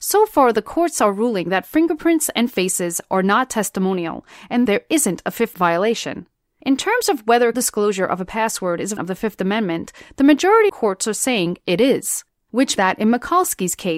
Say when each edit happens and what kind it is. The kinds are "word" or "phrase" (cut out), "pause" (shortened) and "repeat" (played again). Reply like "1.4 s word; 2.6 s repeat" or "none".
4.7 s word; 5.5 s word; 7.5 s word; 9.0 s word; 10.7 s word; 12.8 s word